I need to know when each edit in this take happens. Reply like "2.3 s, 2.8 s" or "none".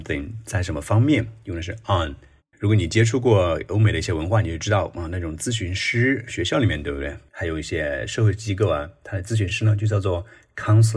2.4 s